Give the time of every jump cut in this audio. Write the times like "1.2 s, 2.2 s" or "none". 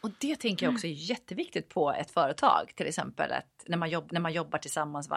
4.1 s